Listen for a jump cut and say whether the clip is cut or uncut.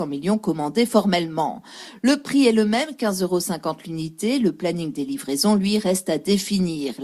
uncut